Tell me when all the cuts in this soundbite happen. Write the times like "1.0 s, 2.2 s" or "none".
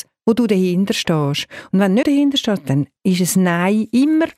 2.0 s